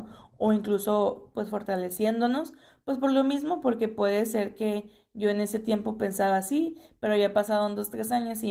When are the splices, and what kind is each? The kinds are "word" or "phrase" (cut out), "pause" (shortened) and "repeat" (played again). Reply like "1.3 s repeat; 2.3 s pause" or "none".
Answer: none